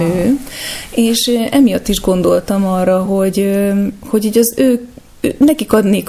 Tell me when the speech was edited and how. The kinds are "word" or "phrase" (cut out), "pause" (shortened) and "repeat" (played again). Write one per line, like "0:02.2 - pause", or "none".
none